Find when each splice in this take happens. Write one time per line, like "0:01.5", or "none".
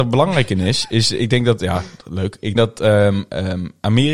0:02.6